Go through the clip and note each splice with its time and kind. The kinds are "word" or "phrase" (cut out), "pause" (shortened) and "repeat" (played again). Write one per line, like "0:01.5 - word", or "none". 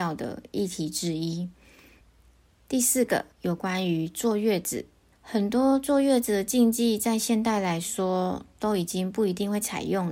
0:02.0 - pause
0:03.3 - pause
0:05.1 - pause